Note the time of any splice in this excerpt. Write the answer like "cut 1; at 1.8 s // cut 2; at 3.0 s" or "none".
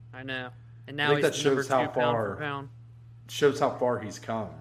none